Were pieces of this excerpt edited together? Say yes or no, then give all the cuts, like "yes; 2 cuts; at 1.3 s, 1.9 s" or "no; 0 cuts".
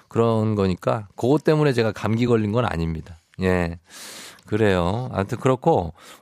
no; 0 cuts